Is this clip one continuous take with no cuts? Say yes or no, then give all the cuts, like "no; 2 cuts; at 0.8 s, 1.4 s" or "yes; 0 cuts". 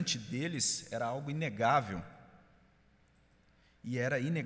yes; 0 cuts